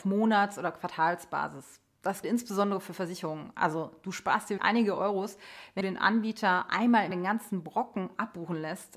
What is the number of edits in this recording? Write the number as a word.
four